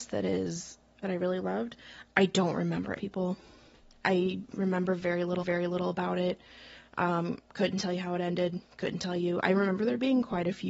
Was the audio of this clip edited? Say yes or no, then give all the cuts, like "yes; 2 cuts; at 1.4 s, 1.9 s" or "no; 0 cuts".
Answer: yes; 3 cuts; at 1.0 s, 3.0 s, 5.4 s